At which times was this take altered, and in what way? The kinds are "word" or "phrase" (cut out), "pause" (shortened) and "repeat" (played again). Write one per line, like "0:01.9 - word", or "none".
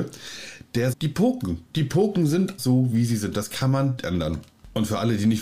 0:00.9 - word
0:01.7 - pause
0:02.6 - word
0:04.0 - word